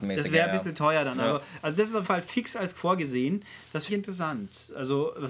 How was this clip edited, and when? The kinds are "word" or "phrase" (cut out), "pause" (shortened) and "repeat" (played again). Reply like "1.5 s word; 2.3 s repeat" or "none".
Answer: 2.0 s word; 2.7 s word; 3.9 s word

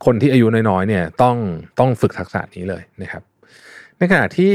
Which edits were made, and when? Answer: 1.7 s pause

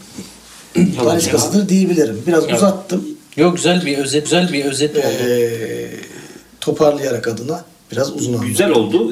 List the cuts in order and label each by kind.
4.2 s repeat; 7.2 s word

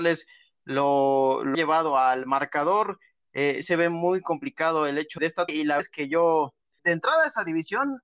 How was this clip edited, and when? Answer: 1.5 s word; 3.6 s word; 5.2 s word; 5.5 s word; 5.8 s word; 6.8 s word

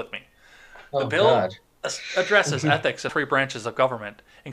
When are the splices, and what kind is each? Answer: 3.1 s word

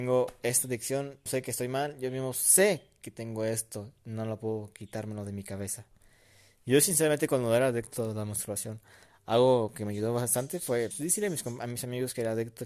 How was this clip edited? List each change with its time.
1.3 s phrase; 10.9 s word

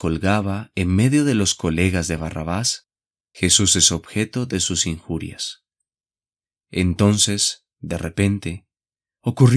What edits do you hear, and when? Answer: none

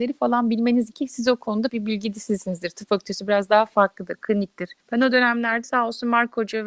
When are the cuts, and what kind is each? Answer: 0.9 s word; 1.7 s word; 4.8 s pause; 5.6 s word

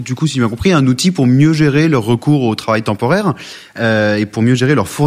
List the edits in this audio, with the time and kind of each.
none

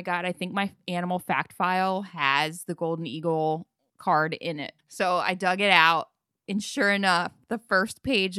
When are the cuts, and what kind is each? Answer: 4.8 s pause

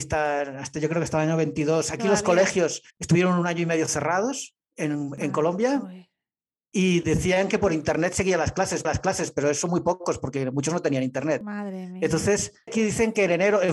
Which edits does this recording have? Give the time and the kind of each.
2.9 s pause; 4.6 s pause; 8.8 s repeat; 12.7 s word

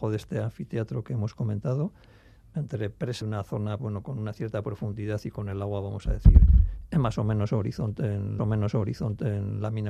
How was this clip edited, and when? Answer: 3.2 s phrase; 3.8 s word; 8.4 s repeat

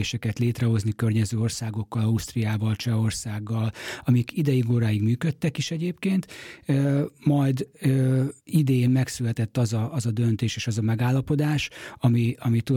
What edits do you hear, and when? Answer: 8.4 s pause

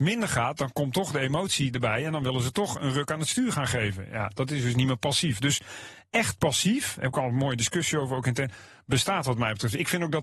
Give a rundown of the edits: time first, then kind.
none

